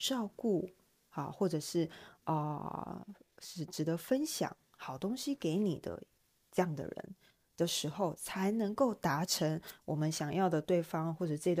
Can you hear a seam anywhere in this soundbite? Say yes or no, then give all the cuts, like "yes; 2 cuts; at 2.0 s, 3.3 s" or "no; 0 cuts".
no; 0 cuts